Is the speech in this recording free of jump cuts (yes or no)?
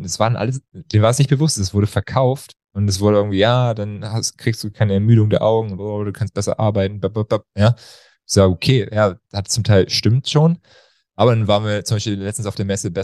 yes